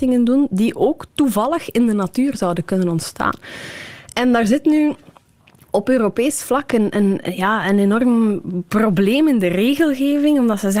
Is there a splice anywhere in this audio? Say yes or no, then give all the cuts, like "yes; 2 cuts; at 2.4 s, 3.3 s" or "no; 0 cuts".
no; 0 cuts